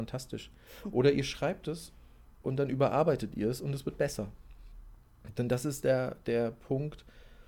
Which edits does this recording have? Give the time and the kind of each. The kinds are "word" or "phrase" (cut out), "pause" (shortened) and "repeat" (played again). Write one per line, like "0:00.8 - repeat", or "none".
none